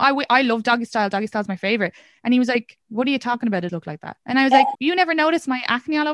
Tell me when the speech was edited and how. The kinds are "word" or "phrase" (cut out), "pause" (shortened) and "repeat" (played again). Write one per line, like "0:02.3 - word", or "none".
0:02.8 - pause
0:03.7 - word
0:04.2 - pause
0:04.7 - word